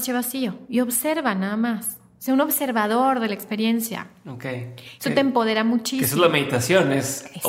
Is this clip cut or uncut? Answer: uncut